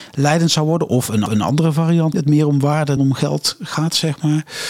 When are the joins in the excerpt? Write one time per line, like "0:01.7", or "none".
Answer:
0:01.3
0:02.1
0:03.0